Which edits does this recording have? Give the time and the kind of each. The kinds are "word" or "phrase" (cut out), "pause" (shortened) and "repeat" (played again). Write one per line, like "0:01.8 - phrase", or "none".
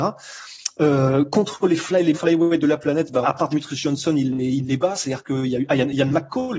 0:02.1 - word
0:03.2 - word